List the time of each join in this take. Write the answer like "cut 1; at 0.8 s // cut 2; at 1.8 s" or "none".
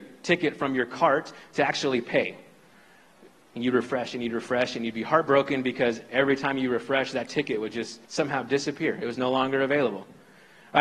cut 1; at 8.0 s